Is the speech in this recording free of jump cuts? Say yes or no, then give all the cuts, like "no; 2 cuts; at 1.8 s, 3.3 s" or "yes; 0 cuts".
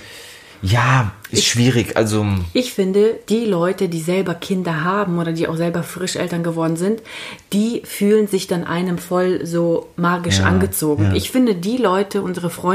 no; 1 cut; at 1.3 s